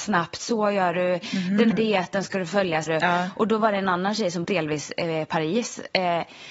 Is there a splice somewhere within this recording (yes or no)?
yes